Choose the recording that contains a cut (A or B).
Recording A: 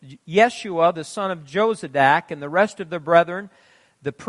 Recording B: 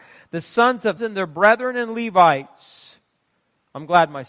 B